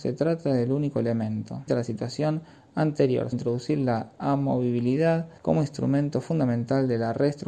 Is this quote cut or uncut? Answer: cut